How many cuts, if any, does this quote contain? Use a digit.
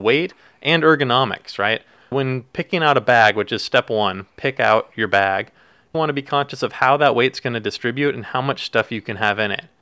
2